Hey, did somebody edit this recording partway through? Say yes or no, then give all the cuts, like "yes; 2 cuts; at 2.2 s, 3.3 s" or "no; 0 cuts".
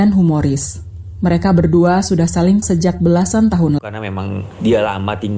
yes; 2 cuts; at 2.6 s, 3.8 s